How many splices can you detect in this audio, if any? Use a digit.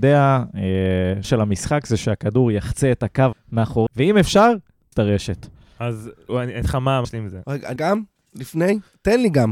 8